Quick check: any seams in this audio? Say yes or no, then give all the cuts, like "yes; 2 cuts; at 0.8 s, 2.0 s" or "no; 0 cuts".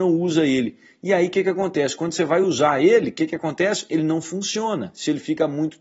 no; 0 cuts